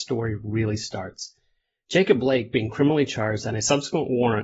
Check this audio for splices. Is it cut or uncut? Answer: uncut